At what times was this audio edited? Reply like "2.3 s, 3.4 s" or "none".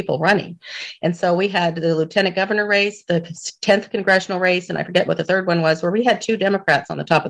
none